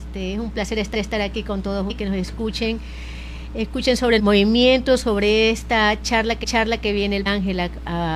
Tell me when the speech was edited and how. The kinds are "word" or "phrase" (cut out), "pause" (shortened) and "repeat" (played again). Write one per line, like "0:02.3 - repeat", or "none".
0:00.9 - repeat
0:01.9 - word
0:04.2 - word
0:06.4 - repeat
0:07.3 - word